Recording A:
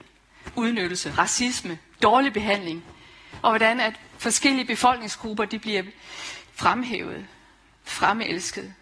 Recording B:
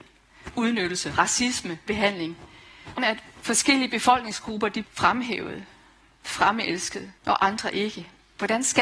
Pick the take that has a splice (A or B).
B